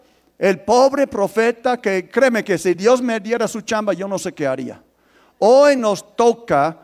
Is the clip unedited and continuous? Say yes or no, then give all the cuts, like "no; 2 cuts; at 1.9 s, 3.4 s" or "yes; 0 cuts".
yes; 0 cuts